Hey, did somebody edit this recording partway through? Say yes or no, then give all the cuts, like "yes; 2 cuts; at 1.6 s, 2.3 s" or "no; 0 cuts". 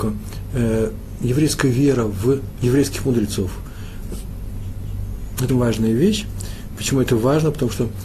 yes; 1 cut; at 5.5 s